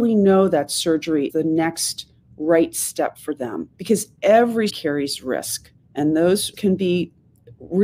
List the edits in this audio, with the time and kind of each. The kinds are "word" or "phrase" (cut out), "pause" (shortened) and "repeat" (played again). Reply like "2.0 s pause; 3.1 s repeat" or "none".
1.3 s word; 3.7 s pause; 4.7 s word; 5.8 s pause; 6.5 s word